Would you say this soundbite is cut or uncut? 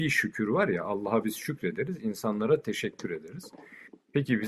uncut